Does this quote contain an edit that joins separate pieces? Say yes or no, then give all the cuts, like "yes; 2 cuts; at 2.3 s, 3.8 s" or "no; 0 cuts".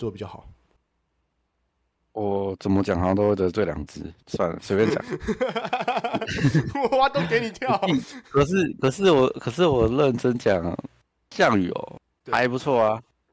no; 0 cuts